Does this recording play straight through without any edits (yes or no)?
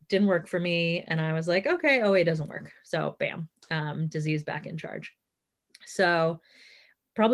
yes